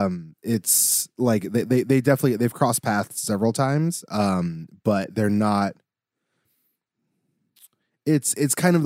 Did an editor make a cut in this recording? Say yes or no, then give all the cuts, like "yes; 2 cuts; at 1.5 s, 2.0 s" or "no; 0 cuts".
no; 0 cuts